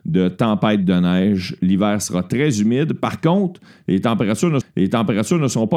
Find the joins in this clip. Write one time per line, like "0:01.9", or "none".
0:04.6